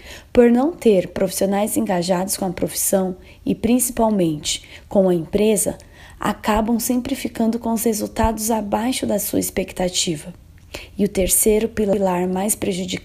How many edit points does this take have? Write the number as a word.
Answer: zero